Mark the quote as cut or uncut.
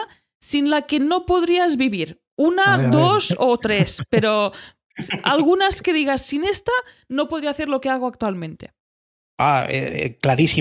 uncut